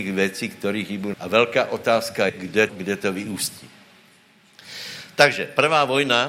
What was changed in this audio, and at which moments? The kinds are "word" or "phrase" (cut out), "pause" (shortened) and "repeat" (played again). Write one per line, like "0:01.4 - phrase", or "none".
0:01.1 - word
0:02.3 - word
0:02.7 - word